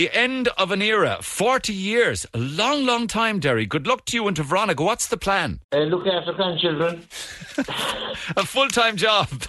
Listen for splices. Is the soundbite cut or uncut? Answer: cut